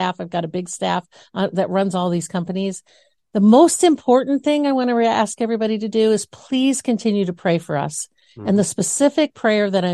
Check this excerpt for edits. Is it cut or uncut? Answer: uncut